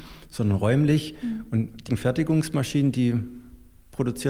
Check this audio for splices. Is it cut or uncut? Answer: cut